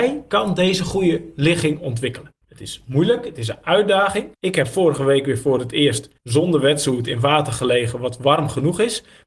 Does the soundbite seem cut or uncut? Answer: cut